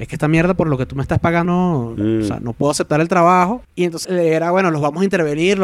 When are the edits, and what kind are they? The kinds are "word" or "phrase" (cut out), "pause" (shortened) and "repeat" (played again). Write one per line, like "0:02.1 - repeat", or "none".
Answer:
0:01.5 - word
0:03.6 - pause
0:04.0 - word